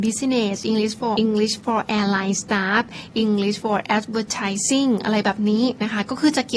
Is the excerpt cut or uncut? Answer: cut